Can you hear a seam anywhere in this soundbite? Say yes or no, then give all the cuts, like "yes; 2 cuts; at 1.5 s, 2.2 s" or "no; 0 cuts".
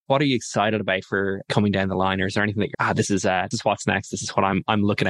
yes; 3 cuts; at 1.4 s, 2.7 s, 3.5 s